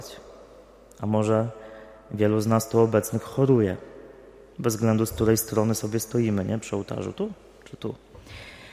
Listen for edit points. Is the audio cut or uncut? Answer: uncut